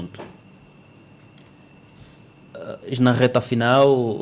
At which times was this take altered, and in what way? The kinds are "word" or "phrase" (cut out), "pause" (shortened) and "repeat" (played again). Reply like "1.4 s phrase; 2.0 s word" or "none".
3.0 s word